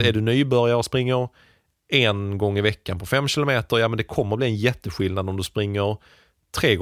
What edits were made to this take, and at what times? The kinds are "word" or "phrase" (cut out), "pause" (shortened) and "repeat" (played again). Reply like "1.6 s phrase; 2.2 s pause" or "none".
none